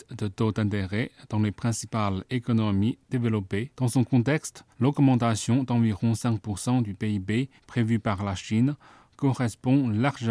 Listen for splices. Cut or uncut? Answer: cut